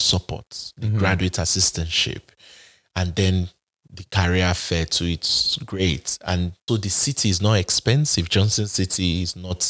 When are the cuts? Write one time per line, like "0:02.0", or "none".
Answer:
0:06.7

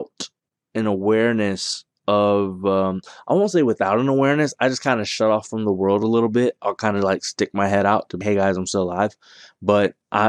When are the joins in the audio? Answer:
0:08.2

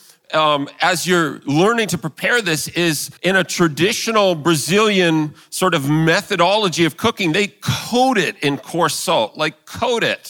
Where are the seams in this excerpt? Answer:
0:03.2

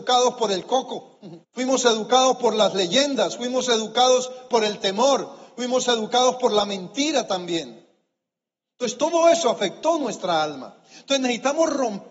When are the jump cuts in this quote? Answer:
0:01.4

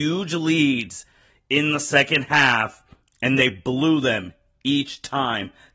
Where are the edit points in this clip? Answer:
none

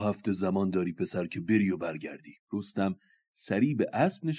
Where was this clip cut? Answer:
0:02.4

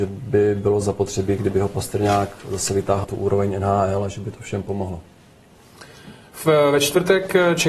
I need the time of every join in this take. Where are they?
0:03.0

